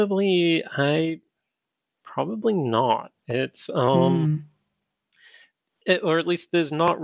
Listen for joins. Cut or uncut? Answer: uncut